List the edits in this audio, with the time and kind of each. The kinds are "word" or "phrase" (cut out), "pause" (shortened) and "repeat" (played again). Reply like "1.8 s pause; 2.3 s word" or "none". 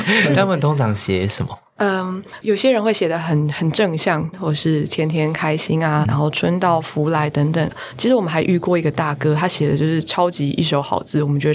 4.3 s phrase; 6.0 s word